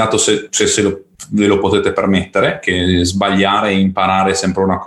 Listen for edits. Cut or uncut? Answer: uncut